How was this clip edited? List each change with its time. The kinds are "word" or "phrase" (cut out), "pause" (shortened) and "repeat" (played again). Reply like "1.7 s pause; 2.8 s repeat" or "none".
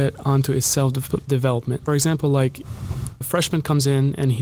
1.9 s phrase; 3.2 s word